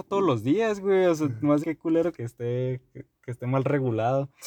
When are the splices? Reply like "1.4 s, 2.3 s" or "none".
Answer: 1.6 s, 2.1 s